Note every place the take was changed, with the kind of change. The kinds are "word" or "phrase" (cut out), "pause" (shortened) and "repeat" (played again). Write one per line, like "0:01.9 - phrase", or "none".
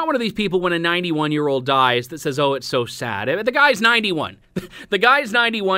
0:04.4 - pause